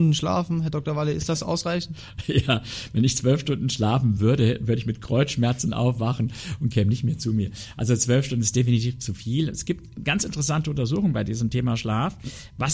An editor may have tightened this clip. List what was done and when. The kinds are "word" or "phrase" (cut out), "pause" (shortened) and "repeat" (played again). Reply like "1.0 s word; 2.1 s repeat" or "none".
none